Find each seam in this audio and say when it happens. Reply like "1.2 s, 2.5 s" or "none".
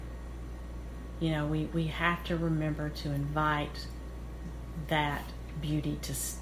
none